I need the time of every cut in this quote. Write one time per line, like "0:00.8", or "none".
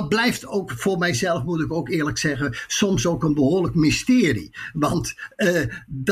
none